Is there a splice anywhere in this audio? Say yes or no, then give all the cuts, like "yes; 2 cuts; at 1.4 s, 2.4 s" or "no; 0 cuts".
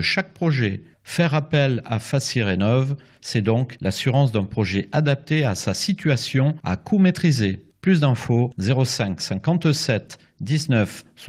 no; 0 cuts